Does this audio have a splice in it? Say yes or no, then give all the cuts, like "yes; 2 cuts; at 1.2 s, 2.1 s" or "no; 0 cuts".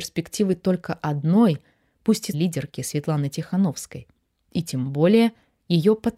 yes; 1 cut; at 2.3 s